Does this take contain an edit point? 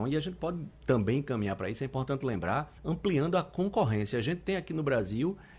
yes; 1 cut; at 2.8 s

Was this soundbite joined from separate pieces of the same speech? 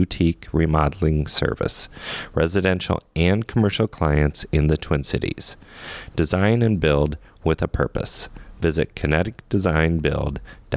no; 0 cuts

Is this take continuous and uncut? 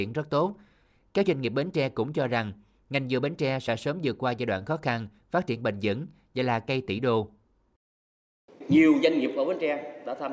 yes; 0 cuts

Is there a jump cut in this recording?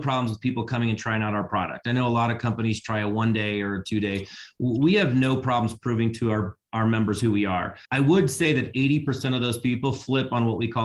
yes; 1 cut; at 7.8 s

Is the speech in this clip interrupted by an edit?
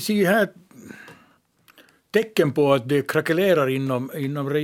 no; 0 cuts

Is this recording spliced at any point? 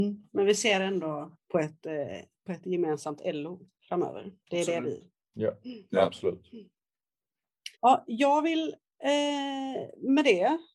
yes; 3 cuts; at 1.4 s, 4.4 s, 7.7 s

